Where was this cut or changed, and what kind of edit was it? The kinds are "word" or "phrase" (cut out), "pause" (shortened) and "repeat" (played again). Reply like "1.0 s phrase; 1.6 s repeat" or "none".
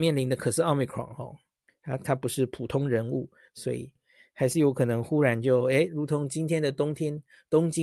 none